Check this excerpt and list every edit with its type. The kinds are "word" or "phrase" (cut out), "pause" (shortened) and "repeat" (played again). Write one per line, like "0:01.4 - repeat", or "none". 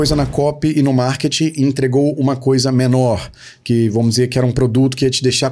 none